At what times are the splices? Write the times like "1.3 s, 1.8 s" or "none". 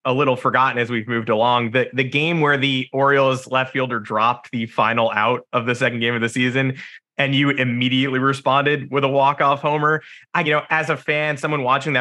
10.4 s